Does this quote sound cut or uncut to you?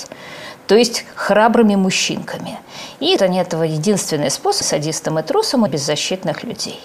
cut